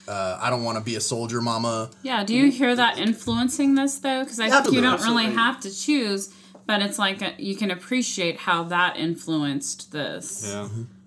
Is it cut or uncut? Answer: cut